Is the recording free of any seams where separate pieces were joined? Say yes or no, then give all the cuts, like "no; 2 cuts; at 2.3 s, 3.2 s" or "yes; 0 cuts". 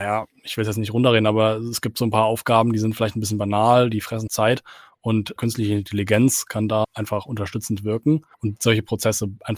no; 4 cuts; at 4.3 s, 5.4 s, 6.8 s, 8.3 s